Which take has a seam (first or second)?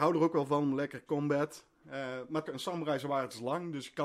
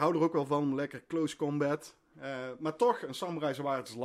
first